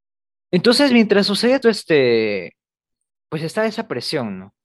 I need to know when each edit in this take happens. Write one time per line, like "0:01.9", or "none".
0:01.6

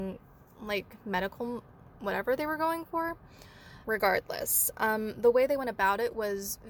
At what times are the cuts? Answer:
0:02.0
0:03.8

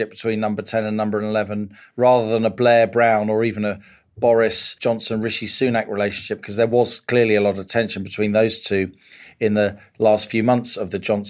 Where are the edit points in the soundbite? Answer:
none

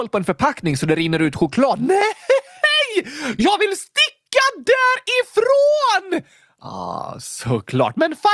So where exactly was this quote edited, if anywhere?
none

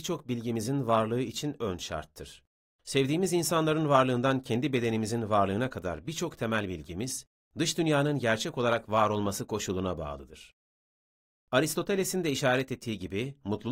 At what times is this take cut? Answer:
none

